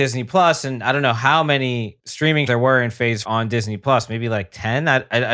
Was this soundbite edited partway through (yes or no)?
yes